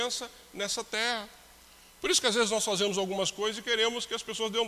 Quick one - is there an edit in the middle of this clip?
no; 0 cuts

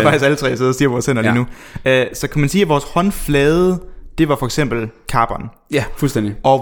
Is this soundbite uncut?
yes; 0 cuts

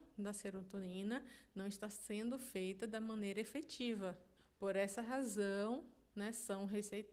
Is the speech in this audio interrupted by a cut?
yes; 1 cut; at 4.4 s

